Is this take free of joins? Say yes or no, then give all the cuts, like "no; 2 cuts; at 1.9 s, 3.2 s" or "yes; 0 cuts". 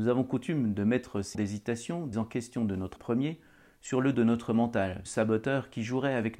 no; 5 cuts; at 1.3 s, 2.1 s, 3.0 s, 4.1 s, 5.1 s